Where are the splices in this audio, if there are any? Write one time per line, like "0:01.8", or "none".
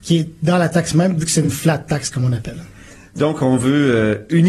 none